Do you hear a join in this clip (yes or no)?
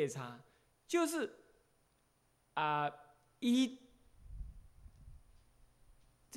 no